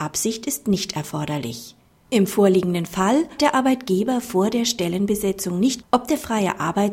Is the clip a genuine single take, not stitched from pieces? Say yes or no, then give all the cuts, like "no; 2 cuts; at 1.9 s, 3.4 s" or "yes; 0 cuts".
no; 2 cuts; at 3.4 s, 5.8 s